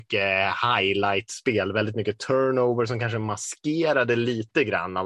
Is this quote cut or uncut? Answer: uncut